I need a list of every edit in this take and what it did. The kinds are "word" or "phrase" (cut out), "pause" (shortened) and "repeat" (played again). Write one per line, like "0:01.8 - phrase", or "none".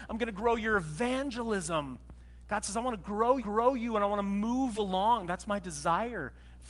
0:03.4 - repeat
0:04.8 - word